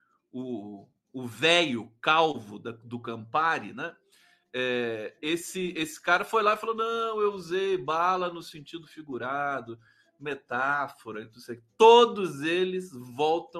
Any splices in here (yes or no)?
no